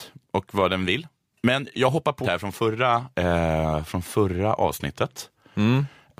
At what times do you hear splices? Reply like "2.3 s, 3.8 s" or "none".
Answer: 1.3 s, 2.2 s, 3.1 s